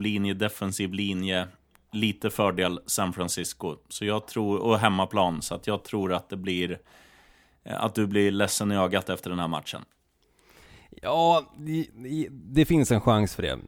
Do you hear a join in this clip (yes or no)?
no